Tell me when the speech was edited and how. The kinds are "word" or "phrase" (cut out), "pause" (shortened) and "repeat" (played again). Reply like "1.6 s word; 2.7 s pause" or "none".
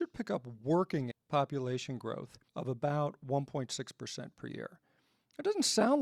1.1 s word; 2.5 s pause